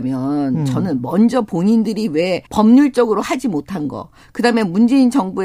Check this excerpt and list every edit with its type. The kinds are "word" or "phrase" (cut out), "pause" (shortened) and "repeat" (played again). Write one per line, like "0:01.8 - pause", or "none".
0:02.5 - pause